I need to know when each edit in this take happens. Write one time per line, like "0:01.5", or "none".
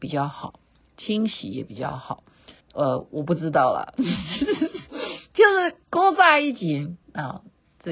0:02.6
0:05.8
0:07.0